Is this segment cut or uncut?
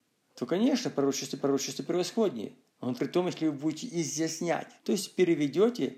cut